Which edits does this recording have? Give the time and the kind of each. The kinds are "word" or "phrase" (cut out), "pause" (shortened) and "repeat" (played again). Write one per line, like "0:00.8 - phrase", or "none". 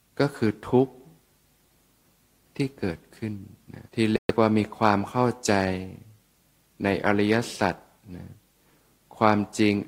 0:03.9 - pause